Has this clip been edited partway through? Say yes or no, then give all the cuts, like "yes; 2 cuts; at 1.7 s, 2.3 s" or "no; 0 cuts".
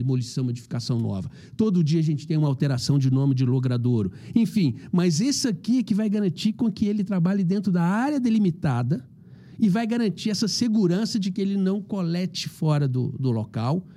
no; 0 cuts